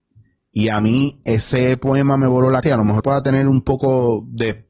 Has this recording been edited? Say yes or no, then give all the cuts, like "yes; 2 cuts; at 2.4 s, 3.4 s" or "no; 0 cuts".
yes; 2 cuts; at 2.6 s, 3.0 s